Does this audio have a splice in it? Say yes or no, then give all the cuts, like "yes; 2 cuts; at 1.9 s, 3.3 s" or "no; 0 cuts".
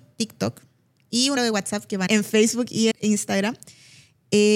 yes; 3 cuts; at 1.4 s, 2.1 s, 2.9 s